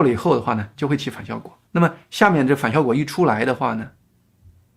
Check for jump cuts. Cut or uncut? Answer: cut